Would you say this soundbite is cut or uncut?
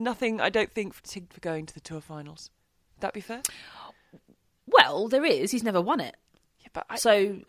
cut